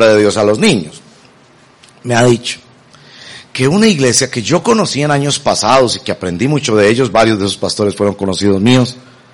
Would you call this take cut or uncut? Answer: uncut